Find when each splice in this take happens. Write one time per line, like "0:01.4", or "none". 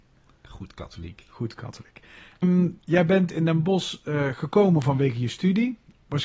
0:02.4